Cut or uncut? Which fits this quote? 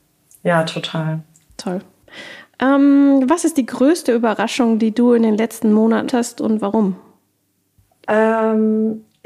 cut